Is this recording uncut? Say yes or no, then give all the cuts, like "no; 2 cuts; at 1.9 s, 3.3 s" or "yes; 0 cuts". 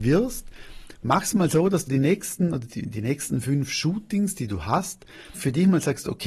no; 3 cuts; at 1.9 s, 2.7 s, 5.3 s